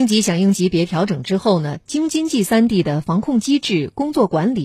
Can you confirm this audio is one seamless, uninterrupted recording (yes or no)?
yes